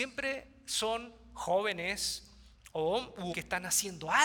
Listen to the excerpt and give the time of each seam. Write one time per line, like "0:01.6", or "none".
0:03.3